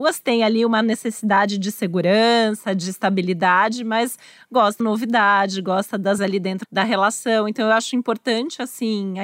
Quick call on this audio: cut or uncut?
cut